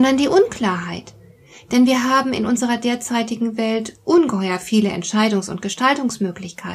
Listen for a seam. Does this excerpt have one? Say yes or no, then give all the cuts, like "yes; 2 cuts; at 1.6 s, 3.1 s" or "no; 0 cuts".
no; 0 cuts